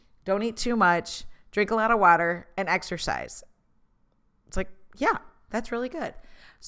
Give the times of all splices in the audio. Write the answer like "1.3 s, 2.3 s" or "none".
none

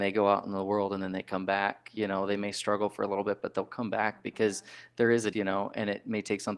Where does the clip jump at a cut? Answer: 5.3 s

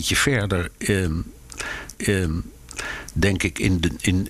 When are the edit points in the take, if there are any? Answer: 1.9 s

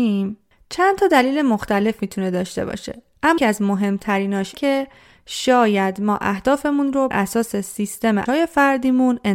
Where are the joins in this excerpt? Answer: 3.4 s, 4.5 s, 7.1 s, 8.3 s

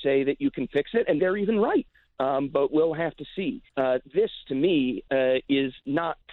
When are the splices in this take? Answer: 1.2 s, 2.7 s, 3.7 s

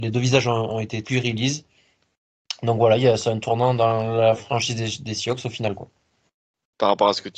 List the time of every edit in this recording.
1.0 s

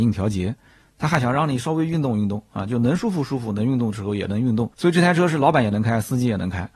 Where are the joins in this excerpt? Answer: 4.7 s

